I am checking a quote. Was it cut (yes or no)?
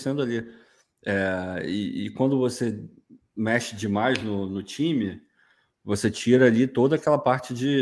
no